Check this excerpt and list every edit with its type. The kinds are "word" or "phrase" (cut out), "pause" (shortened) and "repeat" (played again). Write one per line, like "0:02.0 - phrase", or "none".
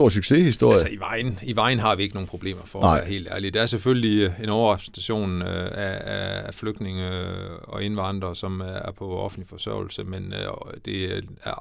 none

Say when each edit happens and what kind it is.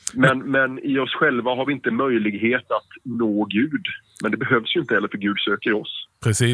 none

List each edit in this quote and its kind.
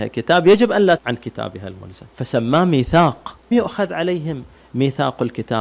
0:01.0 - word
0:02.1 - pause
0:03.5 - word

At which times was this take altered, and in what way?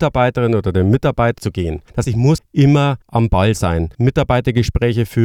0:01.4 - phrase
0:02.0 - word
0:02.4 - word
0:03.0 - pause
0:03.9 - pause

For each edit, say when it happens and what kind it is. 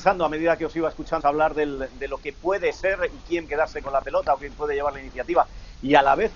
0:01.2 - phrase
0:03.5 - word

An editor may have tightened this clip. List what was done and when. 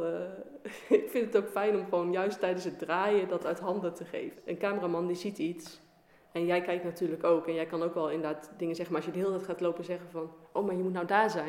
none

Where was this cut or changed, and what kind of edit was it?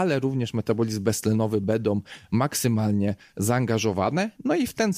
none

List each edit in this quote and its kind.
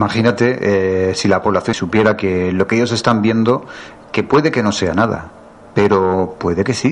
0:01.7 - phrase

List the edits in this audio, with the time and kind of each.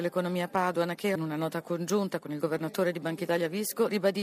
0:01.1 - word

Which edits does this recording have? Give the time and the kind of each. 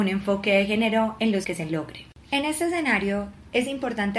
0:01.4 - word

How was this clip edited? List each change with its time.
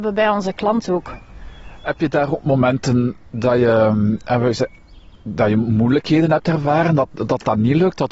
none

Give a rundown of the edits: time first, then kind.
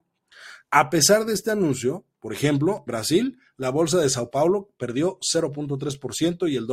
0:02.9 - word

